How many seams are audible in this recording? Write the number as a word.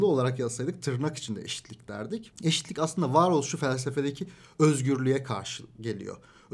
zero